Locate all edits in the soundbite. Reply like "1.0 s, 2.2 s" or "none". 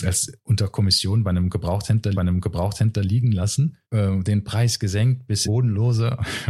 2.1 s, 3.8 s, 5.4 s